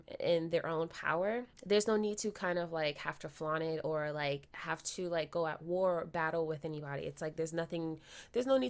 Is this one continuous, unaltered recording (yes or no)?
no